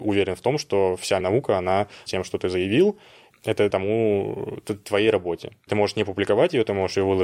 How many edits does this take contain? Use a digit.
5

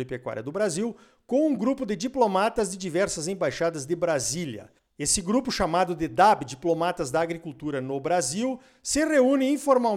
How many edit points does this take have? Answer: 0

